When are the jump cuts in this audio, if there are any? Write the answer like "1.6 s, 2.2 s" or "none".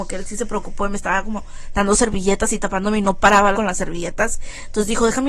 3.5 s